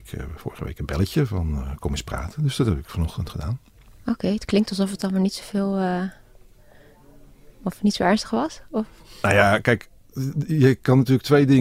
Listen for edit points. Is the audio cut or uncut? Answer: uncut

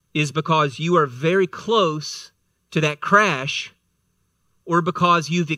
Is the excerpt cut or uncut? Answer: cut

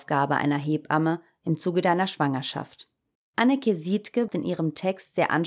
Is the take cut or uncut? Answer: cut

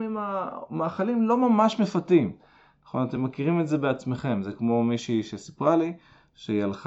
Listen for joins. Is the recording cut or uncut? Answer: uncut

